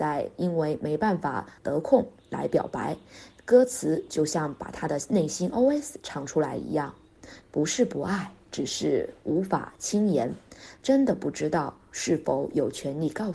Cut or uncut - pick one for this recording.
cut